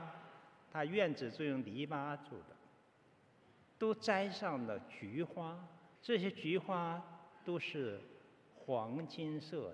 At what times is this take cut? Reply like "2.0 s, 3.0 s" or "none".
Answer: 3.1 s, 6.0 s